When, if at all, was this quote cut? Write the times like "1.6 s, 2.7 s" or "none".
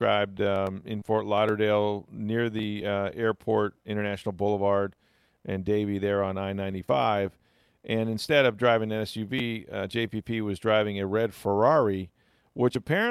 none